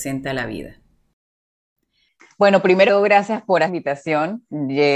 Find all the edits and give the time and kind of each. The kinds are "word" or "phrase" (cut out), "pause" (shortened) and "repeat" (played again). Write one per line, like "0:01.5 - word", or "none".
0:02.9 - word
0:03.7 - phrase